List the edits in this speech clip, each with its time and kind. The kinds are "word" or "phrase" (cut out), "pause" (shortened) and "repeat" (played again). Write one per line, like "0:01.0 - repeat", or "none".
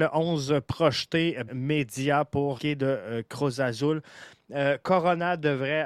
0:01.5 - word
0:02.6 - word